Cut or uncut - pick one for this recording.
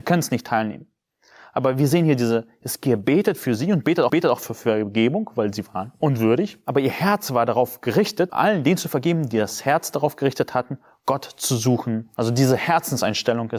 cut